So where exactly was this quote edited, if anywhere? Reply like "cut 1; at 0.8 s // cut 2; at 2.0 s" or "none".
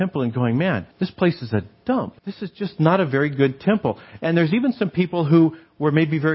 cut 1; at 0.9 s // cut 2; at 2.2 s